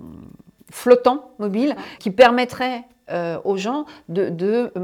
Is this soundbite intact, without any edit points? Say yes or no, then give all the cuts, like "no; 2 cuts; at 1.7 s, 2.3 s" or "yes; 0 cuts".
no; 1 cut; at 2.0 s